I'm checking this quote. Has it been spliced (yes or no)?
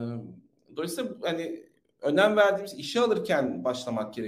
no